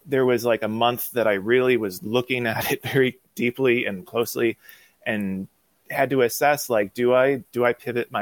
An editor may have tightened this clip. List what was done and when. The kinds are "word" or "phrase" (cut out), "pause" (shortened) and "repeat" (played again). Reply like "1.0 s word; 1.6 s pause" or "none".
none